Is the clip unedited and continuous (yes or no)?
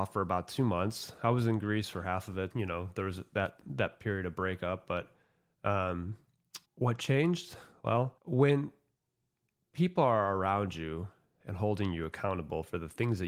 no